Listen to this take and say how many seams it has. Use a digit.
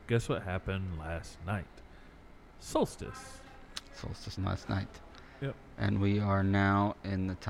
1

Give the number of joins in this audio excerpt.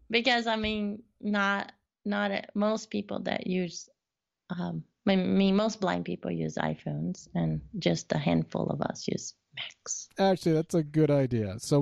0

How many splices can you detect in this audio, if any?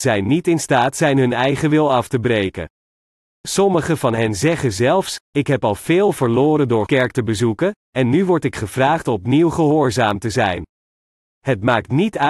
1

